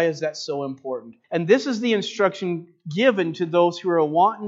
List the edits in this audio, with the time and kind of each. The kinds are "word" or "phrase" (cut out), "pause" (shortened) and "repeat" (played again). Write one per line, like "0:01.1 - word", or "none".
0:01.2 - pause

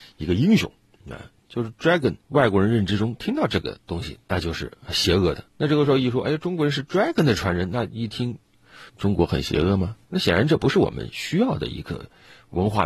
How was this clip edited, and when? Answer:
0:02.2 - pause
0:04.8 - pause
0:05.5 - pause
0:08.9 - pause
0:10.0 - pause

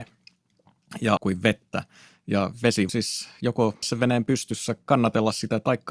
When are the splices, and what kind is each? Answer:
0:01.2 - word
0:02.9 - word
0:03.8 - word

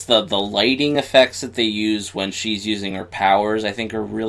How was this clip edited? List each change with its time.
none

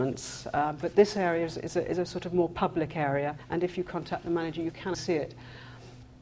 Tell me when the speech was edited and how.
0:04.9 - phrase

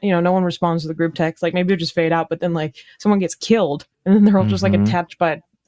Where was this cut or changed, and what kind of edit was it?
0:03.9 - pause

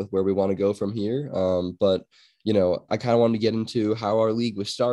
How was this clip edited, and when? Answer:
0:02.9 - word

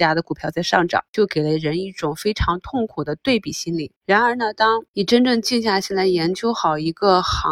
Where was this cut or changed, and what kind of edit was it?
0:01.1 - pause
0:04.0 - pause
0:04.9 - pause

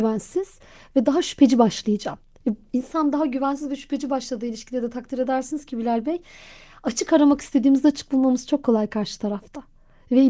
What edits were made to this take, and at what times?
none

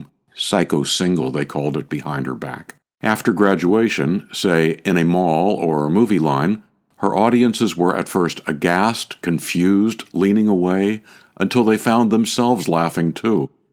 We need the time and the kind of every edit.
0:02.8 - pause

